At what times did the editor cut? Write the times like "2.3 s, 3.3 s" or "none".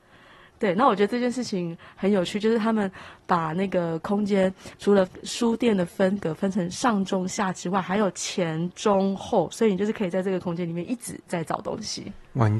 4.7 s